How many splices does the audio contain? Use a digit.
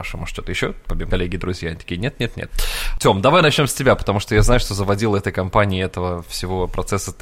1